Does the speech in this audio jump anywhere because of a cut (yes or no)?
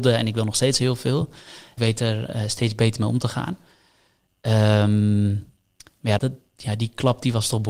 yes